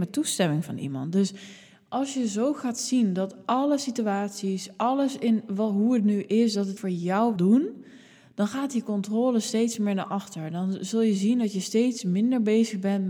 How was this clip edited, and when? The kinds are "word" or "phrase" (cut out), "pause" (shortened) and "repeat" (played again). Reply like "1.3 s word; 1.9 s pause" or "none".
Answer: 6.8 s word; 7.4 s word